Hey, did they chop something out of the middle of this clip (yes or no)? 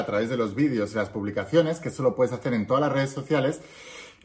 no